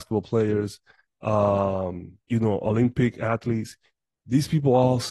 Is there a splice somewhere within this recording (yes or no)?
yes